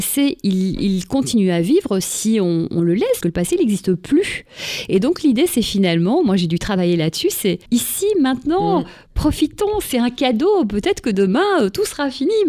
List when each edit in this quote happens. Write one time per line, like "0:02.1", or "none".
0:03.2
0:07.7